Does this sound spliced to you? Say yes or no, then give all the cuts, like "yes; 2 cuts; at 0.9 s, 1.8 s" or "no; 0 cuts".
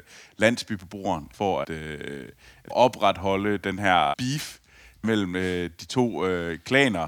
yes; 5 cuts; at 1.3 s, 1.6 s, 2.7 s, 4.1 s, 5.0 s